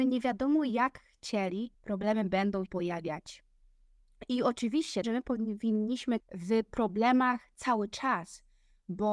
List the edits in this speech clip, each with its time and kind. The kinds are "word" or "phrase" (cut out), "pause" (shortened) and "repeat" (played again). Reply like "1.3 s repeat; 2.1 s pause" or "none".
1.7 s pause; 2.7 s word; 5.0 s phrase; 6.2 s word